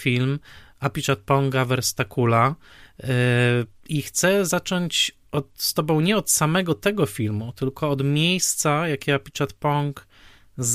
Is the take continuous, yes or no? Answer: yes